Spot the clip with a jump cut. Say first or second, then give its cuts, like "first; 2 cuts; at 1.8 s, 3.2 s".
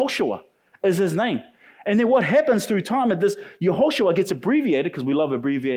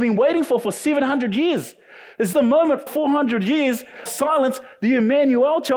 second; 3 cuts; at 2.3 s, 2.9 s, 4.1 s